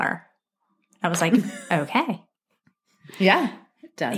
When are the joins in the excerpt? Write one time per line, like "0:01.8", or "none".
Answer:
none